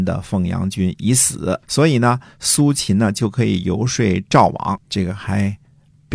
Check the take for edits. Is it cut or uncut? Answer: cut